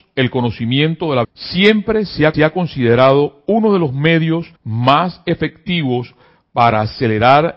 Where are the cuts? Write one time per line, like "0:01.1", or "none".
0:01.2
0:02.3
0:04.6